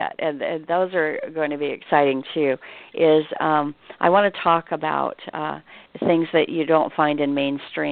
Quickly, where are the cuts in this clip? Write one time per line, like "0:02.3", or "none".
0:05.9